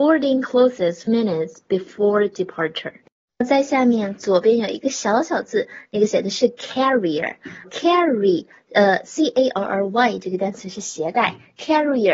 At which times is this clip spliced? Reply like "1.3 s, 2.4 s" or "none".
1.1 s, 7.6 s